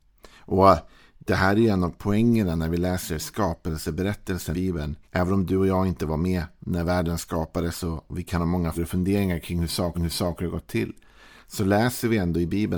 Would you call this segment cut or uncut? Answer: cut